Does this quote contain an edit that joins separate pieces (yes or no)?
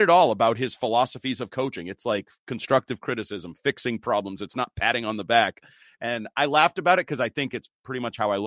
yes